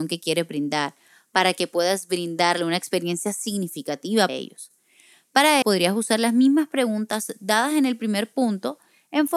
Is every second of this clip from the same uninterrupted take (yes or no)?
no